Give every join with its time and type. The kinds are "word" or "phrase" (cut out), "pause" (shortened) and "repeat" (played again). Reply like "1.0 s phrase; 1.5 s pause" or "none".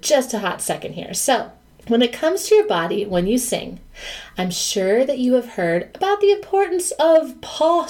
none